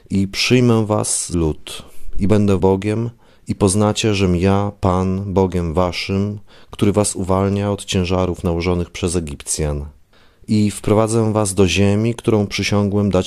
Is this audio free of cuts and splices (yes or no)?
no